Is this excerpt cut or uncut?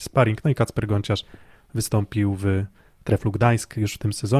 uncut